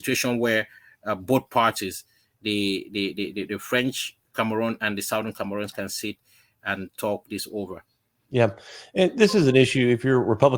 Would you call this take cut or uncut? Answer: uncut